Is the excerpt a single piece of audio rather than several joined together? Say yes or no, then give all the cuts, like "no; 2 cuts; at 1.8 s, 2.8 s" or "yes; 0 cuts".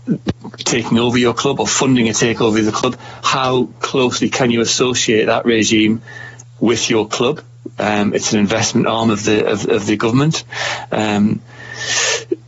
yes; 0 cuts